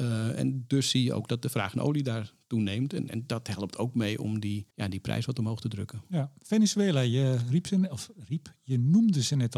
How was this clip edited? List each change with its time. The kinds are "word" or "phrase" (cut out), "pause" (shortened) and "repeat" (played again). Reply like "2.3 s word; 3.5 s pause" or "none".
4.7 s pause

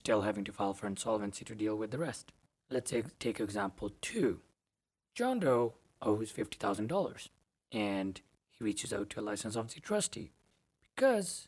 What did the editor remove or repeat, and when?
none

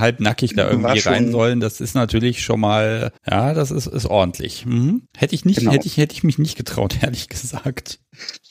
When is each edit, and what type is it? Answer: 3.2 s pause; 5.1 s pause

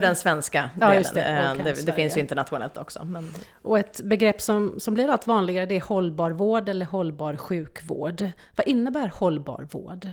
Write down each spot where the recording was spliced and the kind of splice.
none

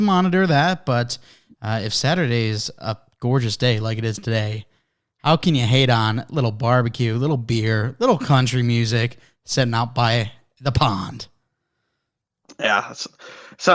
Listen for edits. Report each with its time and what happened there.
none

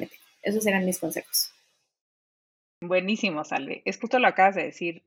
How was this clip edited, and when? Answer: 4.0 s word

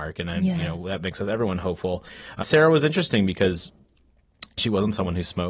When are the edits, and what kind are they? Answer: 2.4 s word

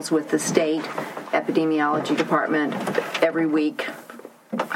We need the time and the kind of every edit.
1.3 s word

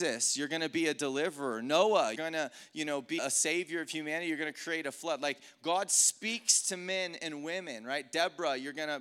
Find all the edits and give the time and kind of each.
2.2 s word; 3.2 s word

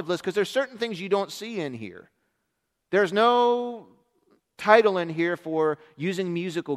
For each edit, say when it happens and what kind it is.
none

